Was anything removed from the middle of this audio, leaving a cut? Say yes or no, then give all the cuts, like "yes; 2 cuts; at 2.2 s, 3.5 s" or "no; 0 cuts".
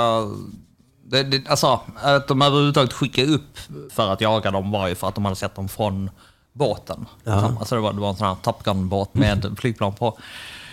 yes; 2 cuts; at 3.9 s, 9.2 s